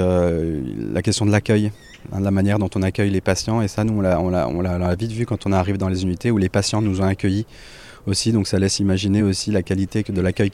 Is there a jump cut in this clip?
no; 0 cuts

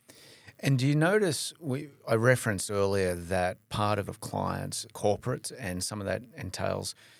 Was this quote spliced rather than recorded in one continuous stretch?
yes; 3 cuts; at 3.6 s, 4.1 s, 4.9 s

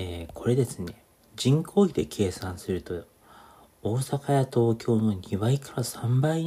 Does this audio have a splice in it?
no; 0 cuts

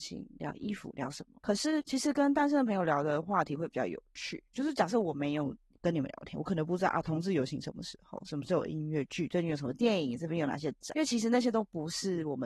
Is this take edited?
no; 0 cuts

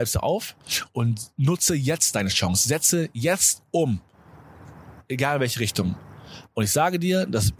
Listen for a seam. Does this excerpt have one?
no; 0 cuts

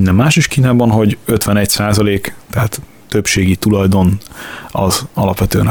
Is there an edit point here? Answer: no; 0 cuts

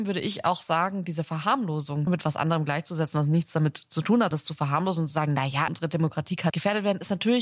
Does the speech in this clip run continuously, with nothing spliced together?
no; 4 cuts; at 2.1 s, 4.3 s, 5.7 s, 6.5 s

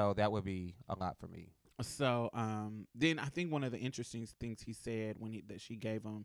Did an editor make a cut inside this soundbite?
yes; 1 cut; at 4.3 s

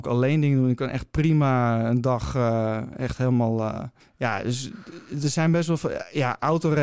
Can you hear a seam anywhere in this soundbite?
yes; 1 cut; at 4.0 s

